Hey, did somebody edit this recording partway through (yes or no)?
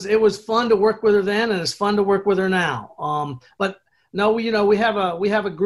no